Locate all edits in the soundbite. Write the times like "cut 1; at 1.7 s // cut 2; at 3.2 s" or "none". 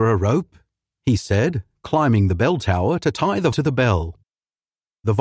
cut 1; at 3.5 s